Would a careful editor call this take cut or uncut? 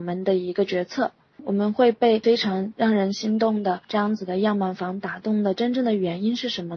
uncut